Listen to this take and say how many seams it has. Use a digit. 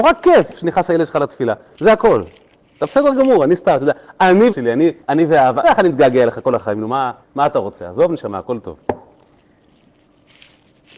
4